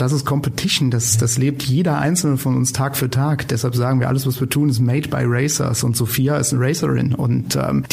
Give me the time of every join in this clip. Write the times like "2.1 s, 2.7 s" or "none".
none

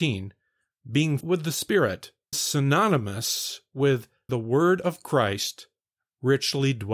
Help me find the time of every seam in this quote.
1.2 s, 2.3 s, 4.3 s

